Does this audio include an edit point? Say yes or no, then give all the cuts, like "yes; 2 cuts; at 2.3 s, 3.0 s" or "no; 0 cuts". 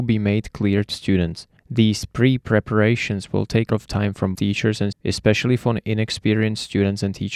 yes; 4 cuts; at 0.9 s, 3.7 s, 4.3 s, 4.9 s